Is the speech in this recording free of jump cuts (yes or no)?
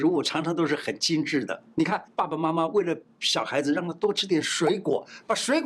no